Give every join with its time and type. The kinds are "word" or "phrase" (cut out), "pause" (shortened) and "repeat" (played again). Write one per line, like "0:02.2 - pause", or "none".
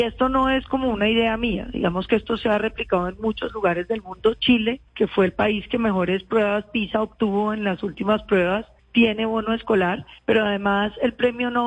0:04.9 - pause
0:08.8 - pause
0:10.2 - pause